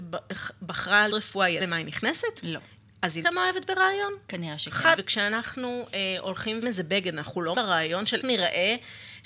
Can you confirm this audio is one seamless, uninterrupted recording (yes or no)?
no